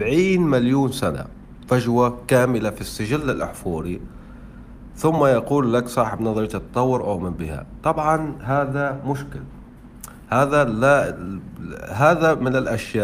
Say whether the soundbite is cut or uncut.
uncut